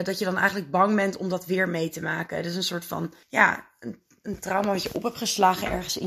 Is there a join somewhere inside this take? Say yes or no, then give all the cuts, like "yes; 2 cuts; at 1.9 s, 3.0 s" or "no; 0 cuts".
yes; 1 cut; at 3.2 s